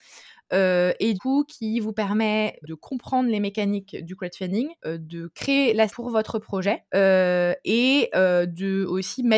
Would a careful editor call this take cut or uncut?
cut